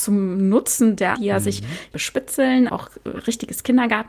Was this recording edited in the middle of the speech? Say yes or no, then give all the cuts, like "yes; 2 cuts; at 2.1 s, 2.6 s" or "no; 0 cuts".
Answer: yes; 3 cuts; at 1.2 s, 1.9 s, 2.7 s